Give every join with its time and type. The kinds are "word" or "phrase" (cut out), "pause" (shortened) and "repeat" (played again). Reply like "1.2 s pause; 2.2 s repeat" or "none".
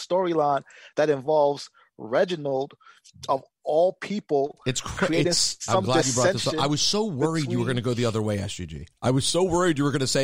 none